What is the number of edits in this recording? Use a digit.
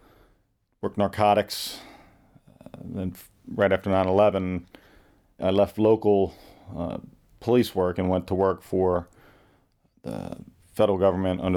1